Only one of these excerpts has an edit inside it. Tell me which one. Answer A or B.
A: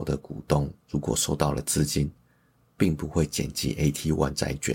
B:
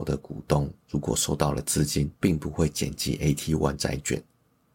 B